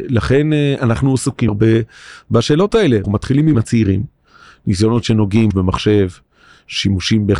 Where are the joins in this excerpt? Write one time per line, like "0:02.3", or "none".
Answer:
0:01.5
0:03.0
0:03.5
0:05.5